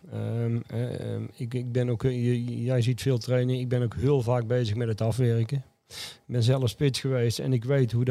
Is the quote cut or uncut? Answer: uncut